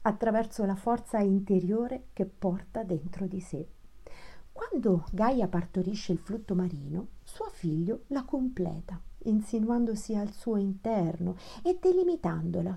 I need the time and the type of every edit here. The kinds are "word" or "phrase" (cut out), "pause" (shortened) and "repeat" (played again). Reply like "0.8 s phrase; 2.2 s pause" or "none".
none